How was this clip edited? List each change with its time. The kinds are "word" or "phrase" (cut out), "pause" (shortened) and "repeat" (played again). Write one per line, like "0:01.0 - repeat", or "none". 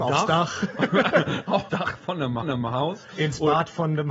0:01.7 - word
0:02.4 - repeat